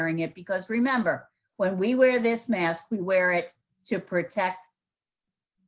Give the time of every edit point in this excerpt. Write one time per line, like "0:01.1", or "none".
none